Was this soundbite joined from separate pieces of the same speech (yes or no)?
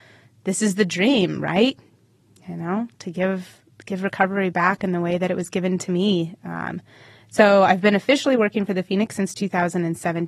no